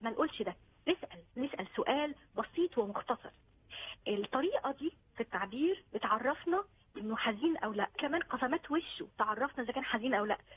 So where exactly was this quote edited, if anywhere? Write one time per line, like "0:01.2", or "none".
0:04.0
0:05.9
0:08.0

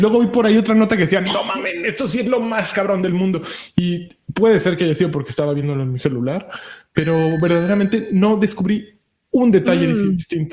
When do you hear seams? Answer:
none

